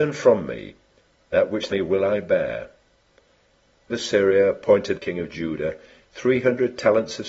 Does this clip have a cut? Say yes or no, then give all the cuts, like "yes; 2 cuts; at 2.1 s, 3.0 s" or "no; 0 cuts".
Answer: yes; 3 cuts; at 1.7 s, 3.9 s, 4.9 s